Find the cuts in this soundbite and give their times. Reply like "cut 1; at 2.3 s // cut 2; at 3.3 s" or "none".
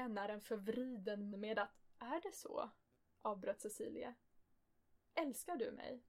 cut 1; at 1.3 s